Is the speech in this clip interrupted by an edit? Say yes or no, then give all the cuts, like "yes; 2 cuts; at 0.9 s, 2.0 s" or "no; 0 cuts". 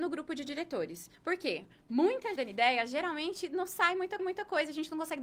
yes; 3 cuts; at 1.1 s, 2.4 s, 4.2 s